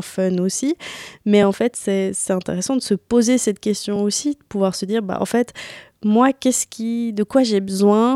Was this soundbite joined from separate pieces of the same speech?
no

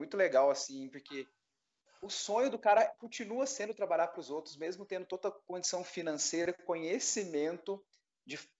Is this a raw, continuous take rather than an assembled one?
yes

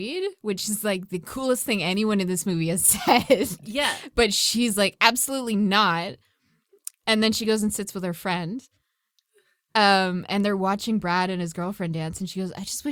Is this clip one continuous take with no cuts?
yes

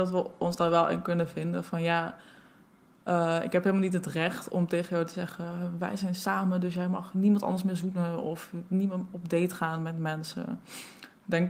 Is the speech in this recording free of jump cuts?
yes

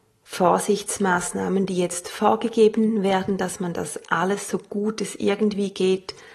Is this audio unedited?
yes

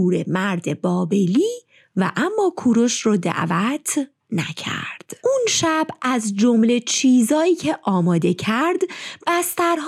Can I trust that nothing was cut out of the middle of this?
yes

